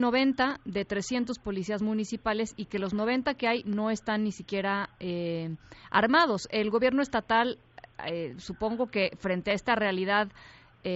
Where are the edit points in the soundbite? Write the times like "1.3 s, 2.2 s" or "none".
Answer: none